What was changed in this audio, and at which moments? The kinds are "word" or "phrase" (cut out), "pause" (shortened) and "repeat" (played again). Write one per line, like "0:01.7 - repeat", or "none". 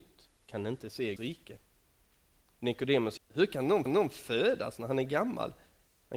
0:01.2 - word
0:03.2 - word
0:03.9 - repeat